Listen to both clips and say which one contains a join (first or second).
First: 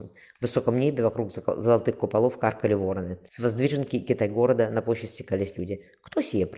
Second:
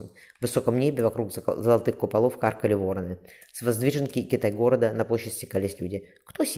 first